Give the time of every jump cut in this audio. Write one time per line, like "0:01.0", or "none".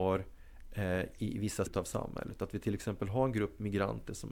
0:01.7